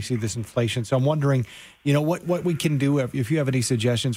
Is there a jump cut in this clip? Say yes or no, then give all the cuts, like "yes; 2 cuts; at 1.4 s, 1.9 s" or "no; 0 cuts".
no; 0 cuts